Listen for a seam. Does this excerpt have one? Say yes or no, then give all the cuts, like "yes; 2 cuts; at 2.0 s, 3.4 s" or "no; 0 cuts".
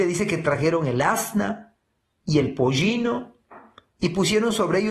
no; 0 cuts